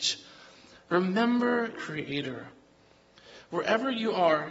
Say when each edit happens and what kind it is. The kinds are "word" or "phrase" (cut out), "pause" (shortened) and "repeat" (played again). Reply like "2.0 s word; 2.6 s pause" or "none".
1.7 s word